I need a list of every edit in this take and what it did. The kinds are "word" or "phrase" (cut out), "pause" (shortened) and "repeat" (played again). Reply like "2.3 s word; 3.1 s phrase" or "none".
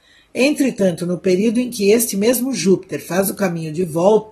none